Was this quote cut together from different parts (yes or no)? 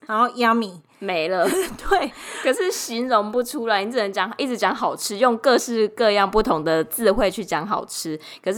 no